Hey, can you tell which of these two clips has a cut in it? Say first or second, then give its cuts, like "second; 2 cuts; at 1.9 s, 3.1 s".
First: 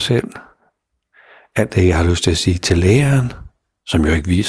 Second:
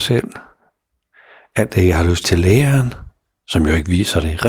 second; 1 cut; at 2.2 s